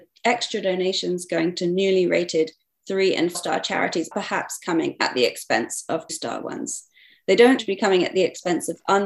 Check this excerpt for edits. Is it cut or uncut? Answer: cut